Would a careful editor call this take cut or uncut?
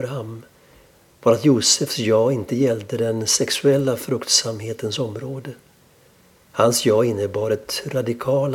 uncut